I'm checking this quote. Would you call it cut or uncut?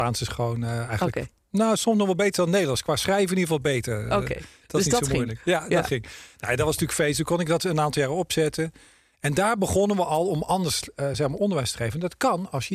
uncut